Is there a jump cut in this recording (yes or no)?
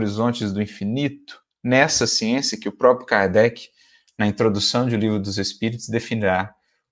no